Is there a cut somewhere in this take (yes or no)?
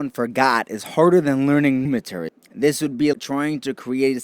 yes